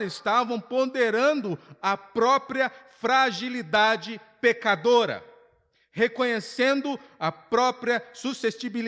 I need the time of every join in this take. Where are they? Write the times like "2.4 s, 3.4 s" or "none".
none